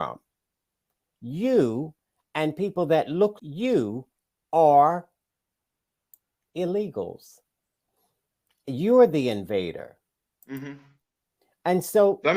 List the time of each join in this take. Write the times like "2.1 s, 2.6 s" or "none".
3.4 s